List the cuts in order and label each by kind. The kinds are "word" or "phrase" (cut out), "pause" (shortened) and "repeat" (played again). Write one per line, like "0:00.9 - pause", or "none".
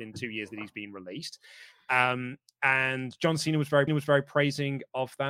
0:03.9 - repeat

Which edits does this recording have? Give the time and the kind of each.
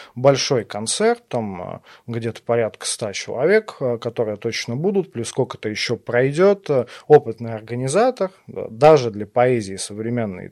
none

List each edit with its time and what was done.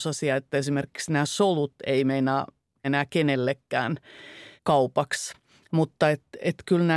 0:02.8 - word
0:04.6 - pause

